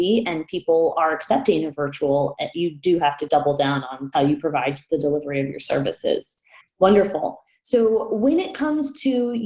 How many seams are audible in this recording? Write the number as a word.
two